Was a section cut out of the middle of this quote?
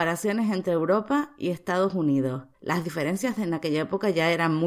yes; 1 cut; at 2.5 s

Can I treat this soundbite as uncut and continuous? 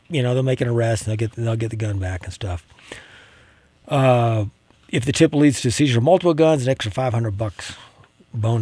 yes; 0 cuts

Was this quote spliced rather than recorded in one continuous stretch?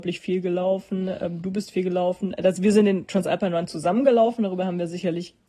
no; 0 cuts

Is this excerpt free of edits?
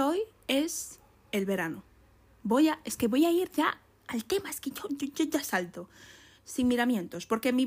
yes; 0 cuts

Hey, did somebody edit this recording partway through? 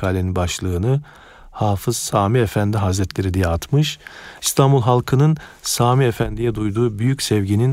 no; 0 cuts

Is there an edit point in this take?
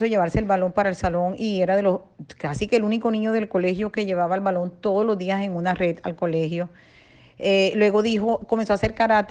no; 0 cuts

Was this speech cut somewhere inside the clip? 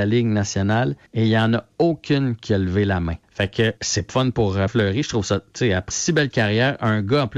yes; 6 cuts; at 1.1 s, 3.2 s, 3.8 s, 4.1 s, 4.7 s, 5.9 s

